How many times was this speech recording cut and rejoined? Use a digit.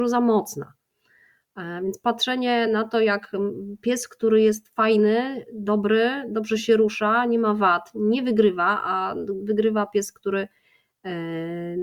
0